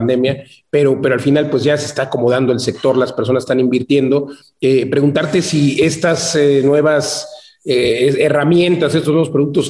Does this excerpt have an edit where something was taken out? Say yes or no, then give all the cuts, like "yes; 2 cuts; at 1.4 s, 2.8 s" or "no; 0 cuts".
no; 0 cuts